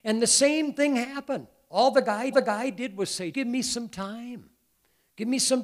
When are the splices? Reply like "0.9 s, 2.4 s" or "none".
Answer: 2.3 s, 3.3 s